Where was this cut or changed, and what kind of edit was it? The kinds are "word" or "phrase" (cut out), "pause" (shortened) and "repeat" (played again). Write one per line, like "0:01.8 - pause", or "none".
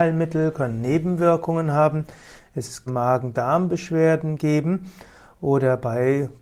0:02.9 - phrase